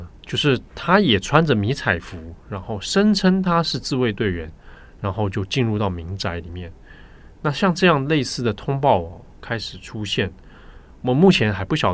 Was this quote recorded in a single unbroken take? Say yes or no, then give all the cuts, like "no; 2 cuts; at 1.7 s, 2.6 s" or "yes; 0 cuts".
yes; 0 cuts